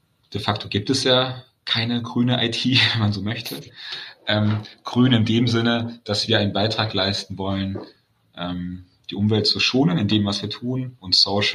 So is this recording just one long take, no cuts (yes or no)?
yes